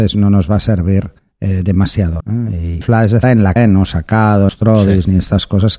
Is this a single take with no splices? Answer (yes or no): no